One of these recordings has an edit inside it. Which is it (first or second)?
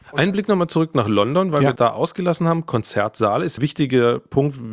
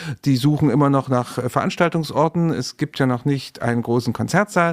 first